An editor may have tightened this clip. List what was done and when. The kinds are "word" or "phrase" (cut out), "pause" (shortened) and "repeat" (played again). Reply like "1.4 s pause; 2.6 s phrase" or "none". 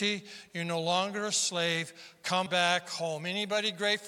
2.5 s word